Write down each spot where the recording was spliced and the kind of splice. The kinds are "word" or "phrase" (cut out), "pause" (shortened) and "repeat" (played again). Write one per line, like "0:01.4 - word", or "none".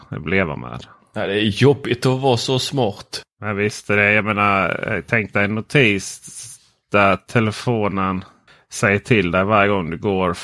none